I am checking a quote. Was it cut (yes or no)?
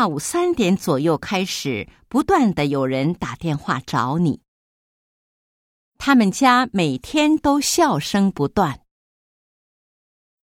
no